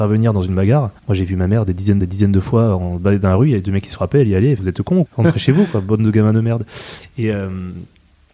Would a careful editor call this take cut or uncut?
cut